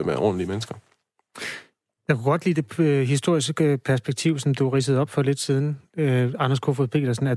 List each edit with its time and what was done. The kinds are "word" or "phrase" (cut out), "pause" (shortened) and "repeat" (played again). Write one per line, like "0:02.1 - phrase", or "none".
none